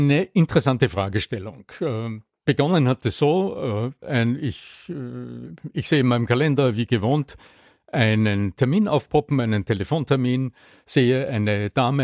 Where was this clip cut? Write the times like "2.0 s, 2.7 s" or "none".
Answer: none

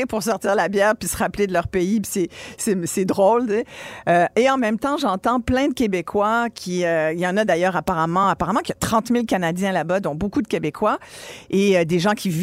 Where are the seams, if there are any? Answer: none

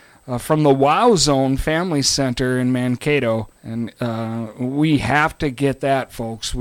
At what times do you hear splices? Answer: 3.5 s

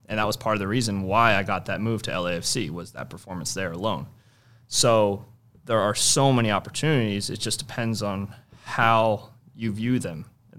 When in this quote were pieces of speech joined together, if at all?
none

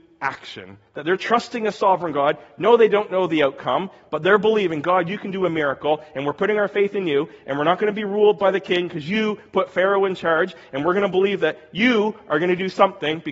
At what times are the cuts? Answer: none

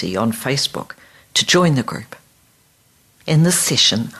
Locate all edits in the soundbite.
none

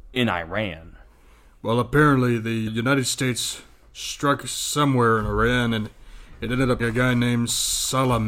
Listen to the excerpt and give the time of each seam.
2.7 s, 6.8 s

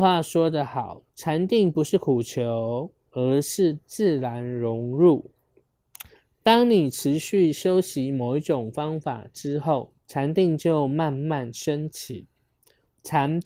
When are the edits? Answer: 1.1 s, 10.0 s

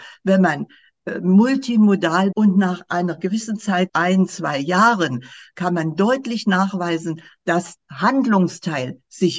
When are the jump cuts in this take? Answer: 2.3 s, 3.9 s, 7.8 s

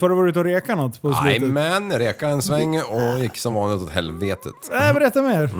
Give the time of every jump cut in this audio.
none

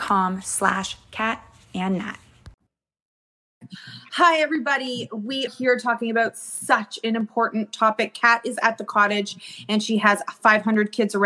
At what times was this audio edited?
5.5 s

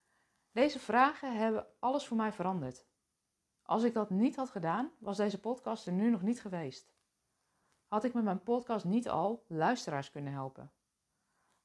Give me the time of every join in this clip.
none

